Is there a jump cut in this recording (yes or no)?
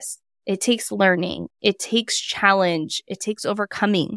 no